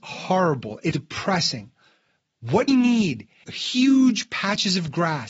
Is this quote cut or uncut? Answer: cut